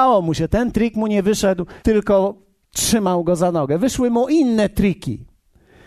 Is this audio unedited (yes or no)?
no